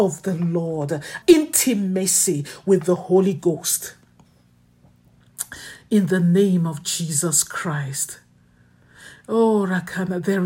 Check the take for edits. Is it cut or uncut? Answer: cut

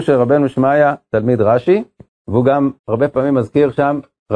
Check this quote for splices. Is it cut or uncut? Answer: cut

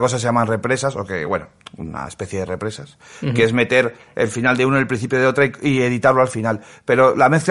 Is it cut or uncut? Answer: uncut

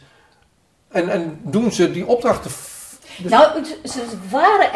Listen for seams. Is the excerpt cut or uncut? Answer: uncut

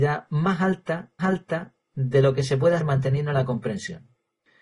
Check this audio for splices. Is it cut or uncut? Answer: cut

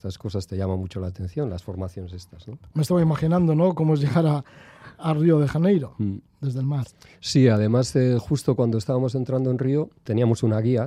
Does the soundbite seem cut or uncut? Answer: uncut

